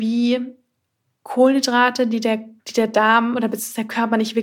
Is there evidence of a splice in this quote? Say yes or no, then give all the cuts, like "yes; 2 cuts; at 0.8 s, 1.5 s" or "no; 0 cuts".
yes; 1 cut; at 2.6 s